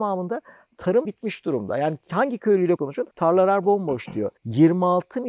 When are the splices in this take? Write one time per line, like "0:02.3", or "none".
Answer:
0:01.0
0:02.8
0:03.1
0:04.4